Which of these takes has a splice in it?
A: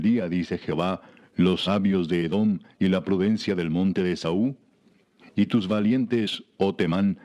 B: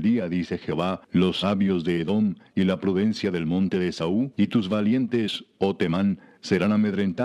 B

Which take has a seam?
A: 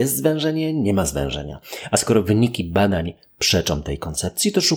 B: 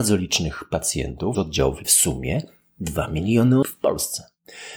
B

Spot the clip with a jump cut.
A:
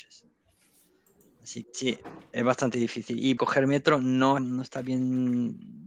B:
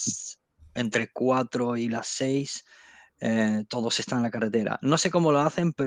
A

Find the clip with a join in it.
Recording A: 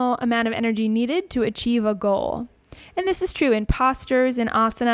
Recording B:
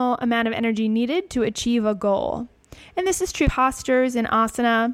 B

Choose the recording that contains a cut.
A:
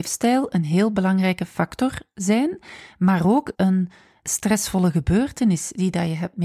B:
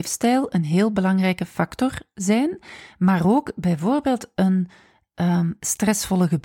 A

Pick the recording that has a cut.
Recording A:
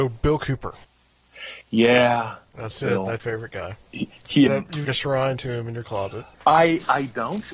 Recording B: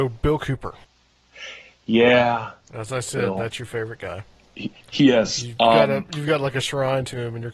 A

